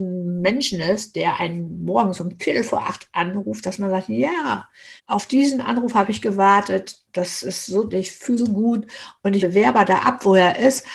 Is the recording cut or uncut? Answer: cut